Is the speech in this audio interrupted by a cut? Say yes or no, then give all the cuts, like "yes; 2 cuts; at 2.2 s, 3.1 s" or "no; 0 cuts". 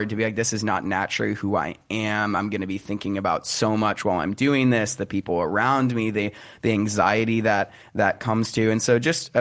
no; 0 cuts